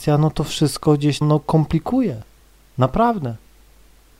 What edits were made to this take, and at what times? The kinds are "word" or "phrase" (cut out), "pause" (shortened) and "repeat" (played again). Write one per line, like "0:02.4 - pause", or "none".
0:01.2 - word
0:02.4 - pause